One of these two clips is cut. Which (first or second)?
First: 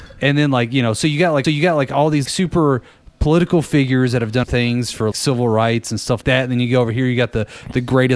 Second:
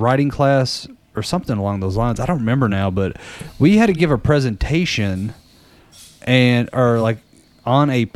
first